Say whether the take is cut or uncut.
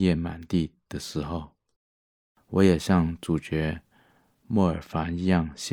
uncut